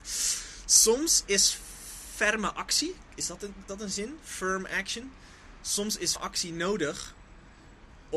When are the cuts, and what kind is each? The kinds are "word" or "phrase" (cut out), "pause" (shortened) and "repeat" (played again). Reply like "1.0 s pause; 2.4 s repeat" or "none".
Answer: 3.7 s word; 6.2 s word